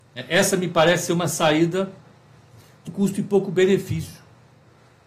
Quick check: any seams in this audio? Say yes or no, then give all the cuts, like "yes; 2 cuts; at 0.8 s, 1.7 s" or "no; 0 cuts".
yes; 1 cut; at 2.9 s